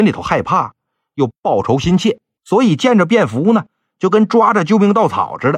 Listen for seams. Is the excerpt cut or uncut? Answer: cut